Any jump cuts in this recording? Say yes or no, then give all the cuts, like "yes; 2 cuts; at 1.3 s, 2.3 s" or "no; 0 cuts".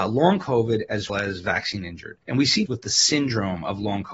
yes; 3 cuts; at 1.1 s, 2.2 s, 2.7 s